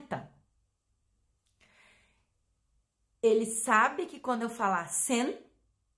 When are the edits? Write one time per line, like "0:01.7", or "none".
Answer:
none